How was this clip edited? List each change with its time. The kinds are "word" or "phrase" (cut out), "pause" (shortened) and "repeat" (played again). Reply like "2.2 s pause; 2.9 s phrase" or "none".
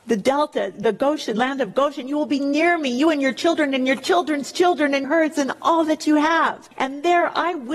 5.0 s phrase